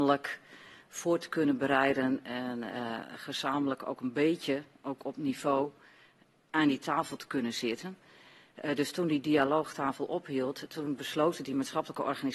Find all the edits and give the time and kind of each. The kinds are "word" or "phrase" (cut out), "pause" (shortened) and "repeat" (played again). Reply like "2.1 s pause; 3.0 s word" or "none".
none